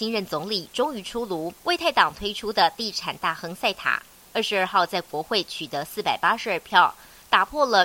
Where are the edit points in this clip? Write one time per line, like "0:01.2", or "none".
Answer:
0:01.6